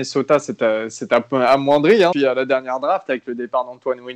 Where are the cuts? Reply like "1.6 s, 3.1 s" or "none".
2.1 s